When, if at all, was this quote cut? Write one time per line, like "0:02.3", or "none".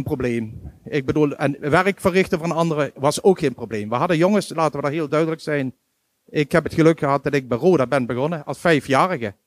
none